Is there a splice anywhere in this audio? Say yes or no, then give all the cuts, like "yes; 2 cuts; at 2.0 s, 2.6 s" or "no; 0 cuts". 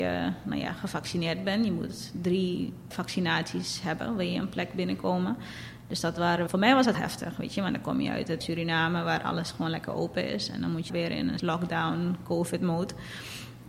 yes; 6 cuts; at 2.9 s, 6.5 s, 6.9 s, 8.4 s, 10.9 s, 11.4 s